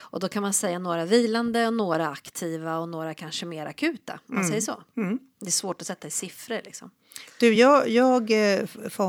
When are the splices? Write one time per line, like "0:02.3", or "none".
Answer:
none